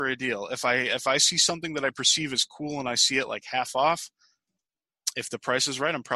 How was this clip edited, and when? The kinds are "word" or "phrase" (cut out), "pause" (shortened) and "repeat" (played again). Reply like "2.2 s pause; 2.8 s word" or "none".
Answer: none